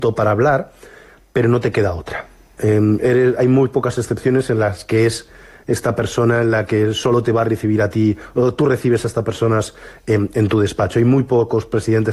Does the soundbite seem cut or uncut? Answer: uncut